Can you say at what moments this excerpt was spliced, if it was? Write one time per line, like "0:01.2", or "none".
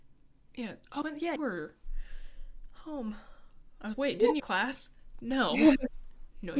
0:01.0
0:01.4
0:03.9
0:04.4

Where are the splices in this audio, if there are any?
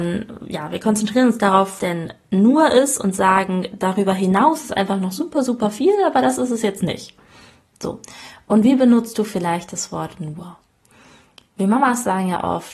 0:01.8

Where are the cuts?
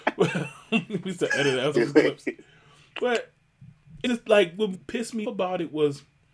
0:01.7
0:04.1
0:04.7
0:05.2

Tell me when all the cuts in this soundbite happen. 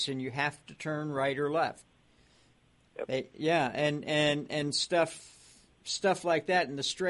none

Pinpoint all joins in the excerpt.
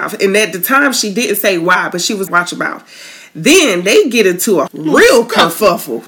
0:02.3
0:04.7

